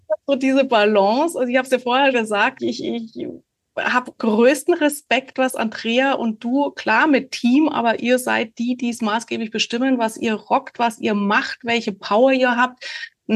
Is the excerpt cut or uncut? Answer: cut